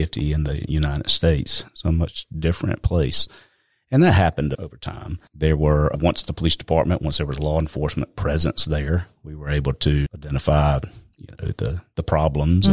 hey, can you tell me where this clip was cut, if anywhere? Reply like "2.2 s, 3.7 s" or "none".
none